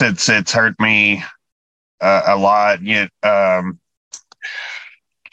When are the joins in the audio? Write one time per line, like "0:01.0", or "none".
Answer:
none